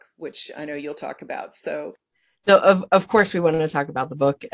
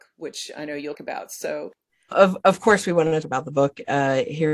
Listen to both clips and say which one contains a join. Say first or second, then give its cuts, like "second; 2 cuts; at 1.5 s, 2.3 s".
second; 3 cuts; at 0.9 s, 2.1 s, 3.2 s